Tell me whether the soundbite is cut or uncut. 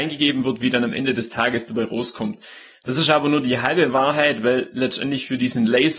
uncut